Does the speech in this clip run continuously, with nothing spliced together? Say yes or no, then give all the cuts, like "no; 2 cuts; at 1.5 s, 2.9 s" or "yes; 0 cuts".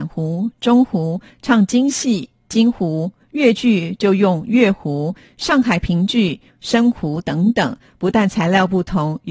yes; 0 cuts